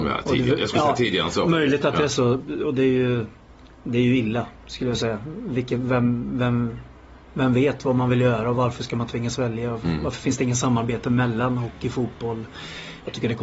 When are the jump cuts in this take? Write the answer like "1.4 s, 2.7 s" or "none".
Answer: none

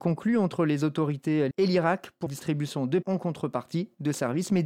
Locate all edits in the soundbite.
1.5 s, 2.3 s, 3.0 s

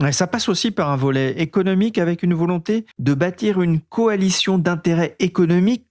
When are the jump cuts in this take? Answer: 2.9 s

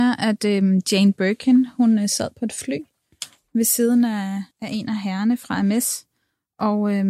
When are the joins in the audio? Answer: 4.5 s

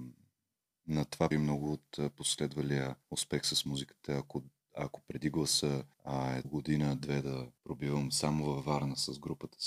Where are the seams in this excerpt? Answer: 1.3 s, 3.0 s, 5.9 s, 6.4 s, 7.6 s

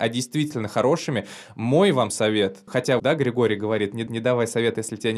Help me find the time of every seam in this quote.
2.7 s, 3.0 s, 4.1 s

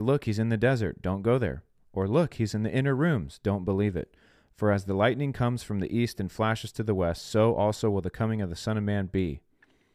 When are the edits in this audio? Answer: none

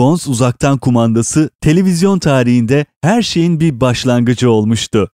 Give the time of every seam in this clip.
none

